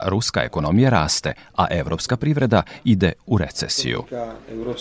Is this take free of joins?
yes; 0 cuts

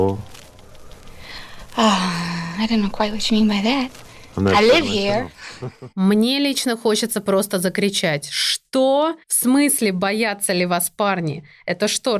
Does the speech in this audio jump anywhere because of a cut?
yes; 2 cuts; at 5.9 s, 9.2 s

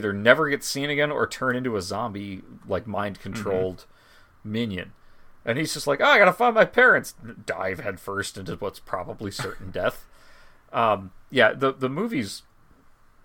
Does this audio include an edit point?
no; 0 cuts

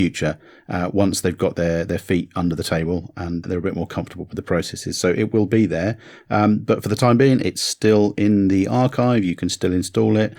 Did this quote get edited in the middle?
yes; 1 cut; at 3.4 s

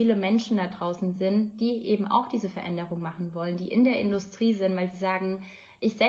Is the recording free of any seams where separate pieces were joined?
yes; 0 cuts

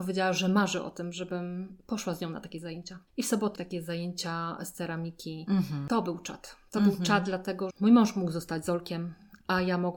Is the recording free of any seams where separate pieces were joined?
no; 3 cuts; at 3.1 s, 3.5 s, 7.7 s

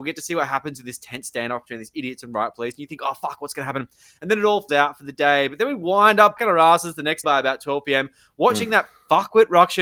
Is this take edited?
yes; 3 cuts; at 4.7 s, 6.4 s, 7.2 s

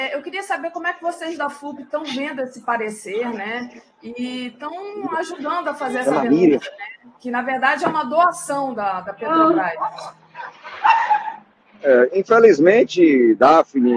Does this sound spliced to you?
no; 0 cuts

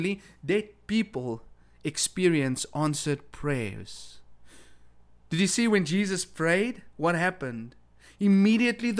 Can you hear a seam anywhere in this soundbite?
no; 0 cuts

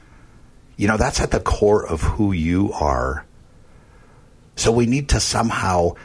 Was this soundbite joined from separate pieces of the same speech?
yes; 1 cut; at 1.4 s

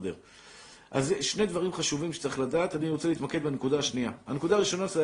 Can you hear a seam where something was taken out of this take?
no; 0 cuts

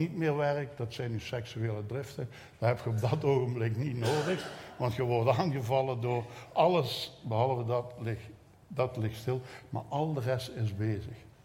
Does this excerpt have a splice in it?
no; 0 cuts

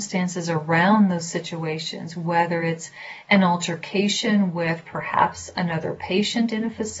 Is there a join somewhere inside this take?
no; 0 cuts

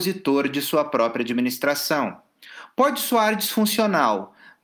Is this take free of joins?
yes; 0 cuts

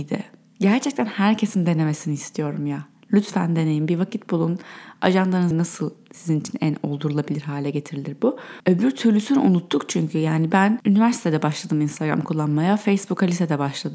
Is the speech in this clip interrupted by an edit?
yes; 1 cut; at 5.5 s

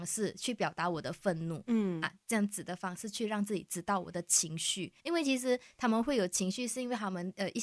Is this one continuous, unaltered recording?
no; 1 cut; at 5.0 s

